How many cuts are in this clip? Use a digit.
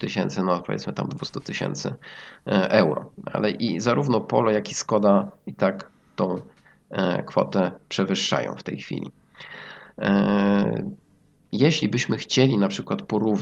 0